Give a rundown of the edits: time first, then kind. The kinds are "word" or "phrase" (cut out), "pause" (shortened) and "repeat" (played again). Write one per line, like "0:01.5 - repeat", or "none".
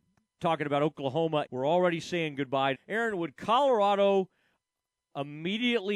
0:01.5 - phrase
0:02.7 - phrase